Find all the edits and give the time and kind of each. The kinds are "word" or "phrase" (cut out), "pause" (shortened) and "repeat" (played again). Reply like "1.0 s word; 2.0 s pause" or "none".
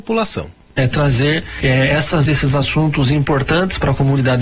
2.3 s word